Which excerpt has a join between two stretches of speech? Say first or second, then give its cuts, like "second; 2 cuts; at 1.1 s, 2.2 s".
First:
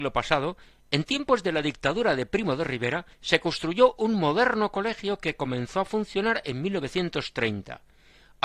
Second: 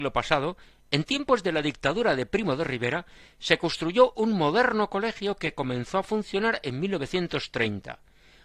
first; 1 cut; at 3.1 s